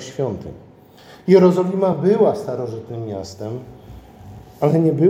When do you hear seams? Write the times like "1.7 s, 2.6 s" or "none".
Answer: none

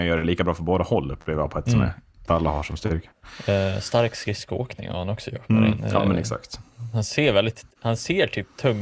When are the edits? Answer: 1.6 s, 2.3 s

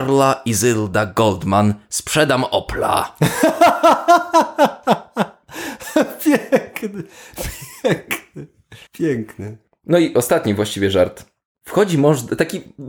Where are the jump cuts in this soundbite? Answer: 8.9 s

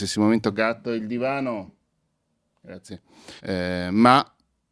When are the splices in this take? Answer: 3.4 s

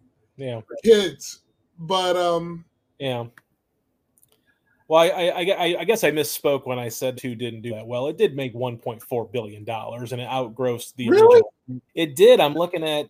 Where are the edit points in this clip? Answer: 7.2 s, 7.7 s, 11.9 s

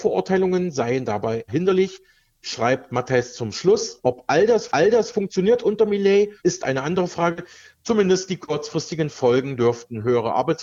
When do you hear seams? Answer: 1.5 s, 4.7 s, 6.4 s

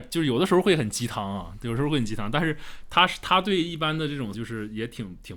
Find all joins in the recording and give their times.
4.3 s

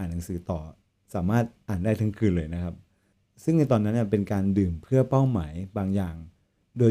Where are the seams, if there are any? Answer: none

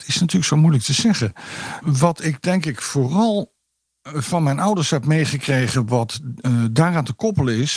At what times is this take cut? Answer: none

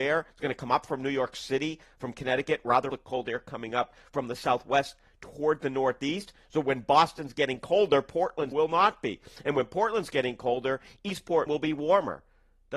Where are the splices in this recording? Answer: 2.9 s, 8.5 s, 11.5 s

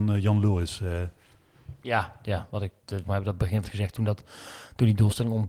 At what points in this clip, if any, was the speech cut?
3.0 s, 3.6 s

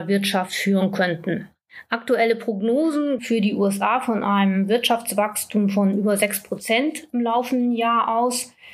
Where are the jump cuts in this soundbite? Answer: 3.2 s

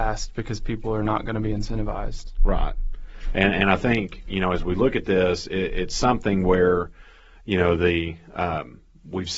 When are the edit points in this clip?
none

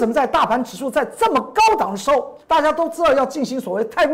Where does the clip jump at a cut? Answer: 2.4 s

